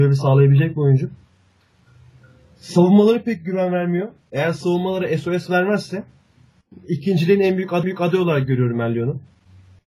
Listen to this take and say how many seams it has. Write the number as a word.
one